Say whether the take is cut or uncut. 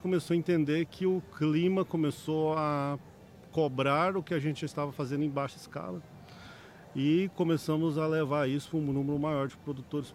uncut